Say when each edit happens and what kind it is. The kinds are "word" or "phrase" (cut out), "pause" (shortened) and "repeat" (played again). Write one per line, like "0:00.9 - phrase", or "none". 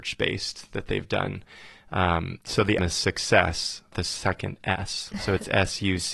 0:02.4 - pause
0:02.8 - word
0:03.9 - word